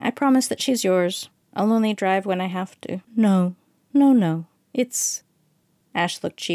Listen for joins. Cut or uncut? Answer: cut